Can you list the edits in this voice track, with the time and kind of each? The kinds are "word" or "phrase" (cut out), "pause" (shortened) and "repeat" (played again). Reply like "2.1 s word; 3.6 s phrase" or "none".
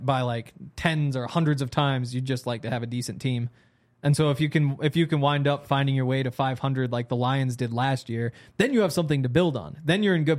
none

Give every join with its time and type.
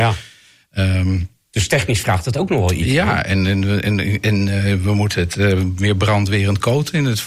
none

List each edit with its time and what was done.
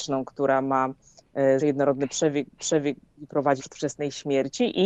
1.6 s word; 2.6 s repeat; 3.6 s word

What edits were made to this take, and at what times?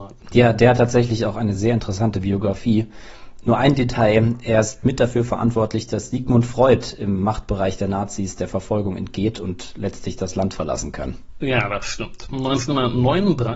none

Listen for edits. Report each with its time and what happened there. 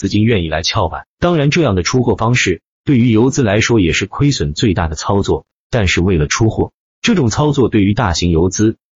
none

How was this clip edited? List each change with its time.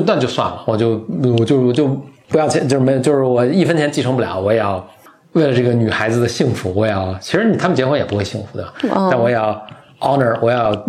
none

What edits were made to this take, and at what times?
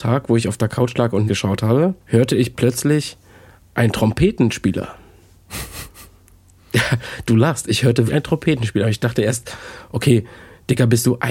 1.3 s word; 2.0 s pause; 8.1 s word

